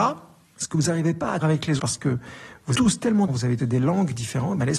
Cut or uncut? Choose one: cut